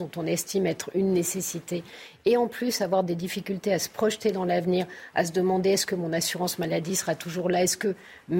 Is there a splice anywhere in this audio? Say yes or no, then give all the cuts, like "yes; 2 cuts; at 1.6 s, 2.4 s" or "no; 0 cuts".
no; 0 cuts